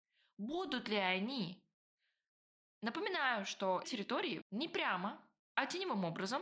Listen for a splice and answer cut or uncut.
cut